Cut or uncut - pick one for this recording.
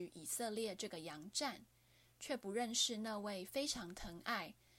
uncut